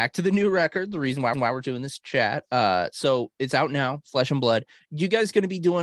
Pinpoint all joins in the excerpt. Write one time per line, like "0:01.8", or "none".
0:01.3